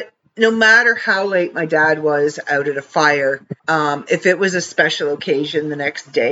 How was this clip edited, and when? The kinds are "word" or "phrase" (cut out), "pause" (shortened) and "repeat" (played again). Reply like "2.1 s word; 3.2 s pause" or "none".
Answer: 3.6 s pause

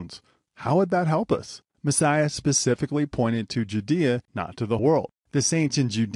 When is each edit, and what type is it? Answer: 1.7 s pause; 4.2 s pause; 4.8 s word; 5.2 s pause

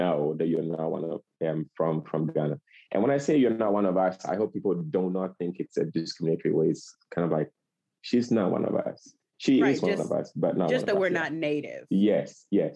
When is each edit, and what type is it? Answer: none

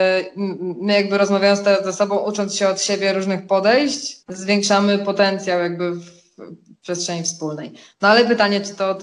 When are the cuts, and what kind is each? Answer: 4.2 s pause

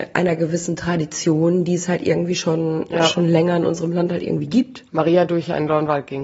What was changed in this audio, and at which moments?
4.9 s pause

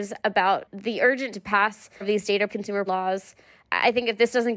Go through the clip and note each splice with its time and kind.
1.3 s word; 2.0 s word; 2.5 s word; 2.9 s word

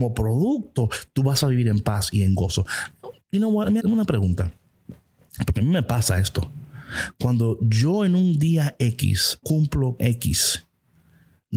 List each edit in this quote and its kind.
3.8 s word; 9.4 s word; 10.0 s word

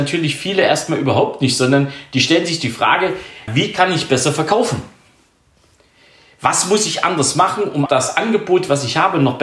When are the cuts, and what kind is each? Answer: 3.5 s word; 7.9 s word

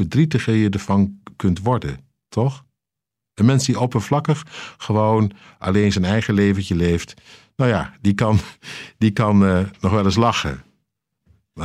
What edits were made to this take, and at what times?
none

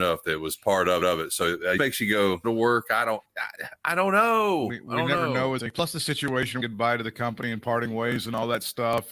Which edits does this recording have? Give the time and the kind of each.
1.0 s repeat; 1.8 s word; 2.4 s phrase; 5.6 s word; 6.6 s phrase

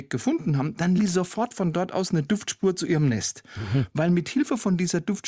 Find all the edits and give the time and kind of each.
1.0 s word

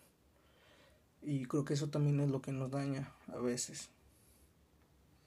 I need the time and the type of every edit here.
none

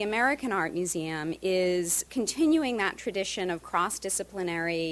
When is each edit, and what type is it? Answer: none

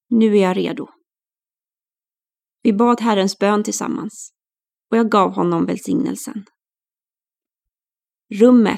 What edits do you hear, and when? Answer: none

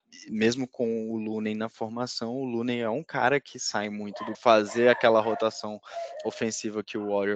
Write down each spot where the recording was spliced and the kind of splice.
4.3 s phrase

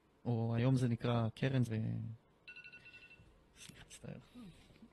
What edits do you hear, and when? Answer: 1.7 s word; 3.8 s word

